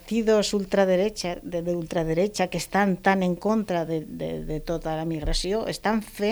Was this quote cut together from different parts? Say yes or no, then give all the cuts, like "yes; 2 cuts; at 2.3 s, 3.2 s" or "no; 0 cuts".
no; 0 cuts